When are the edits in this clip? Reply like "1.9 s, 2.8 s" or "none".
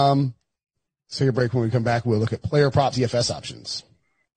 2.9 s